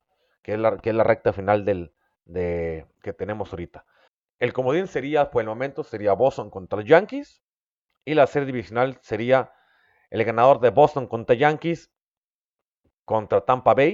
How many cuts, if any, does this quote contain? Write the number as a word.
one